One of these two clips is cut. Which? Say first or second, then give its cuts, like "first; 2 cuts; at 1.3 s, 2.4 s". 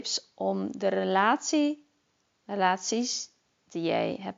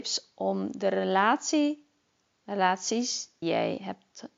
second; 1 cut; at 3.4 s